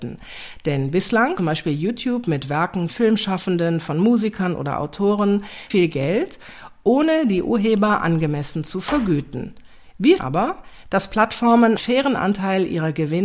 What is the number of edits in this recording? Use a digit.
5